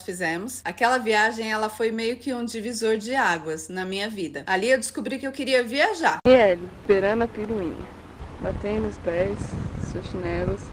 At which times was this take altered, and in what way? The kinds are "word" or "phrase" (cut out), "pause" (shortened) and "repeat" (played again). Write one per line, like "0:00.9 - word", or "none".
0:06.8 - word
0:09.0 - word